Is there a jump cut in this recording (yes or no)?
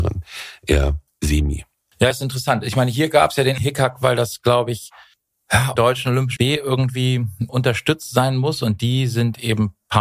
yes